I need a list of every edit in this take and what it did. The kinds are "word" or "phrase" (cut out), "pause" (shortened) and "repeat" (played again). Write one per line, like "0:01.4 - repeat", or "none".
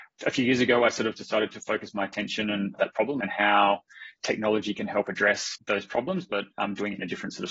0:01.5 - word
0:02.8 - word